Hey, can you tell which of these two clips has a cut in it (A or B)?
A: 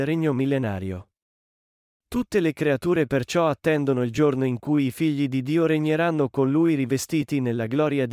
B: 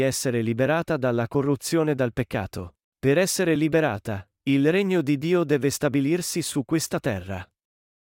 B